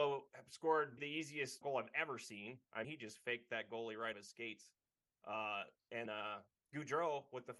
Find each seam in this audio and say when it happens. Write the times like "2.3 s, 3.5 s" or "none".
1.0 s, 1.6 s, 2.8 s, 4.1 s, 6.1 s